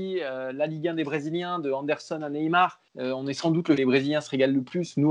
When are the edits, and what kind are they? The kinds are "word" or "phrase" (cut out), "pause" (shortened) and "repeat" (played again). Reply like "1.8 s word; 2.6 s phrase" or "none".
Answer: 2.9 s pause; 3.8 s phrase

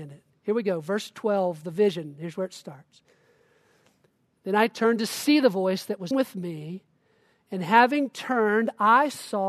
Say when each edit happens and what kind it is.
6.1 s word

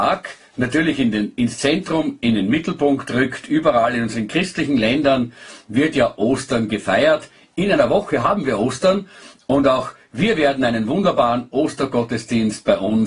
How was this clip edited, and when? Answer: none

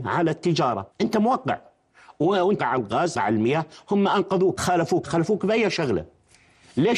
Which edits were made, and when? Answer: 0.9 s pause; 2.6 s word; 3.1 s word; 4.6 s phrase; 5.0 s word

